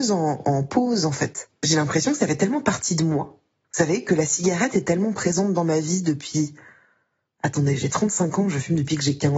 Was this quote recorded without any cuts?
yes; 0 cuts

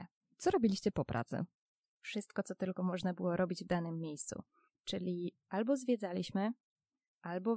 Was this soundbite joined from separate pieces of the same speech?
no; 0 cuts

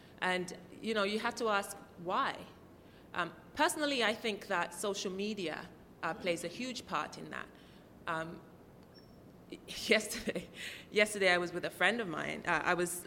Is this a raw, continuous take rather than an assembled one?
yes; 0 cuts

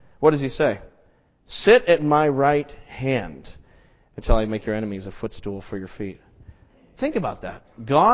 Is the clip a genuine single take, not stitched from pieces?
yes; 0 cuts

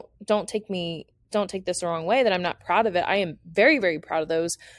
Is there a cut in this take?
no; 0 cuts

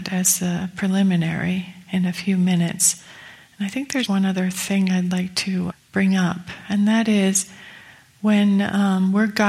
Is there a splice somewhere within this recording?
yes; 1 cut; at 4.1 s

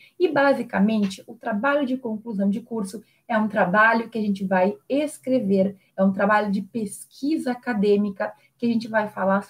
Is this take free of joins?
yes; 0 cuts

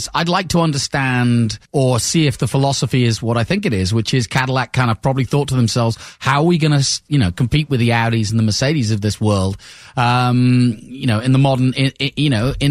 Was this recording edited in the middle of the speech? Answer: yes; 1 cut; at 1.7 s

